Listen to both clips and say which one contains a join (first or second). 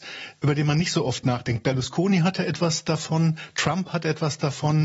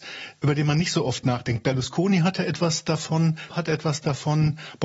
second